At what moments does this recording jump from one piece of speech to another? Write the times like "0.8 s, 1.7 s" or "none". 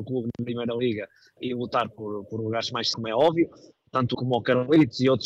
1.4 s, 2.3 s, 2.9 s, 4.1 s